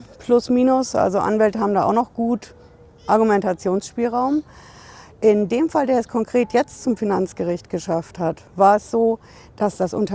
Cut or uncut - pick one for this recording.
uncut